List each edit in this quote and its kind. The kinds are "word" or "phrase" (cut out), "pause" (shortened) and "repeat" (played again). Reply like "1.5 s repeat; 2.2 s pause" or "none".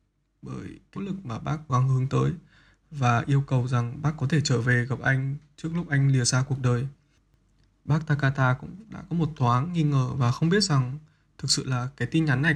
1.0 s word; 1.7 s word